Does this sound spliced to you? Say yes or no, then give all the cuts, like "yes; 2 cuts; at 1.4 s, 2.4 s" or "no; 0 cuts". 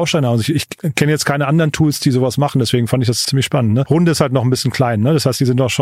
yes; 1 cut; at 3.2 s